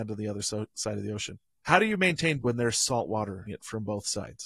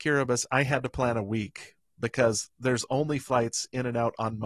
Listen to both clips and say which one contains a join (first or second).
first